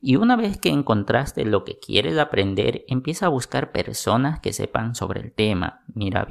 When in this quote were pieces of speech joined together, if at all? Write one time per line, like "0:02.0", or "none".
none